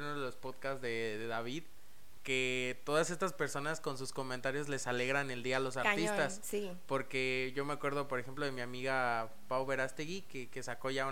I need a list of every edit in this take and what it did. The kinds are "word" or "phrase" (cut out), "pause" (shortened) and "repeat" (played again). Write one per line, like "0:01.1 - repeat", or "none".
0:02.2 - word